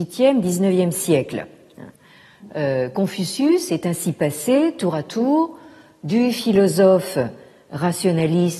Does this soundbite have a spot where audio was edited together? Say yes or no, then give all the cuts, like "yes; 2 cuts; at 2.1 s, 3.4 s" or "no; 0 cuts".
no; 0 cuts